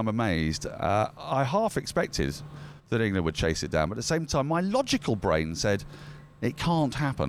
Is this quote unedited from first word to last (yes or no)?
yes